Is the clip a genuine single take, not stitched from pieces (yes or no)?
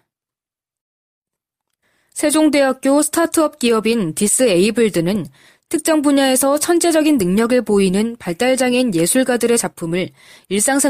yes